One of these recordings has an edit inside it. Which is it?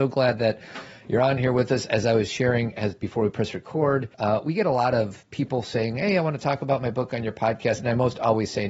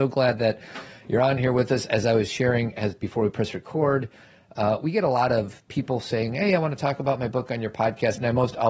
first; 1 cut; at 4.1 s

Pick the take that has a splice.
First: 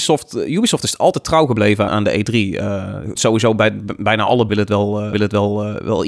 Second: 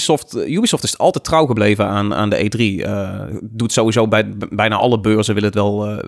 first; 4 cuts; at 1.9 s, 3.2 s, 4.5 s, 5.1 s

